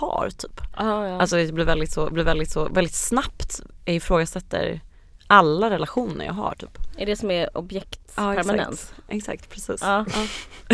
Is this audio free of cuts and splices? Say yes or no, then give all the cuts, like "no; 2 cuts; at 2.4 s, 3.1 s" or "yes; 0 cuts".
no; 2 cuts; at 2.1 s, 7.5 s